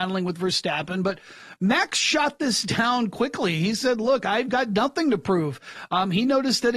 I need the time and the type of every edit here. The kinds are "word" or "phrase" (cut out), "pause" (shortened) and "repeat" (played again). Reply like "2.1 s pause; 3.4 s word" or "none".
none